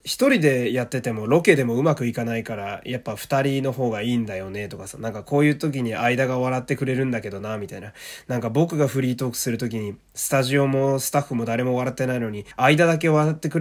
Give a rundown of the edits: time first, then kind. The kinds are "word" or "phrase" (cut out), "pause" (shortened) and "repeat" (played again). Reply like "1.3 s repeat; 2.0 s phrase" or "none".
12.5 s pause